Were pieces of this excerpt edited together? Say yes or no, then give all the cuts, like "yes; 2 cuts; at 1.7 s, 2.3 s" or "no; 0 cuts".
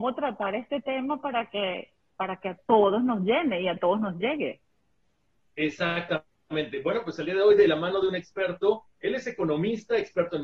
no; 0 cuts